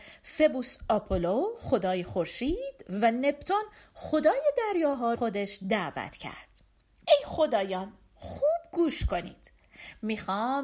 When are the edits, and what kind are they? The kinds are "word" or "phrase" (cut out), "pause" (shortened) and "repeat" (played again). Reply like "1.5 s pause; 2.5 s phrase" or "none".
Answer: 5.2 s phrase; 7.0 s phrase